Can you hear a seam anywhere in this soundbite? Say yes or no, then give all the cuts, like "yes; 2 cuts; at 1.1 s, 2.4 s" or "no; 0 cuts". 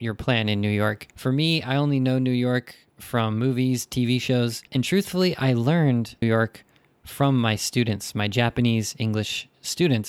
yes; 3 cuts; at 1.1 s, 4.7 s, 6.2 s